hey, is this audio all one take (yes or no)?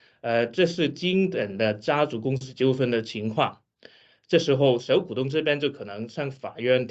yes